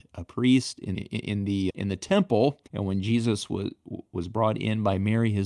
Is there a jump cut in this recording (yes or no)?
yes